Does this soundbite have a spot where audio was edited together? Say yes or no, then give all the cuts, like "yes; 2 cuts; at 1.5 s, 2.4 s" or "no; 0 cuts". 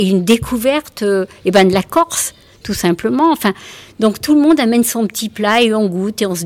no; 0 cuts